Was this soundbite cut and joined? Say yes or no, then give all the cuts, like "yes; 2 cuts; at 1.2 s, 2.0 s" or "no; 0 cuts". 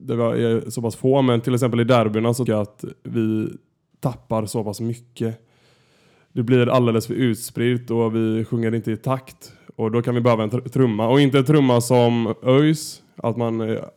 yes; 1 cut; at 2.5 s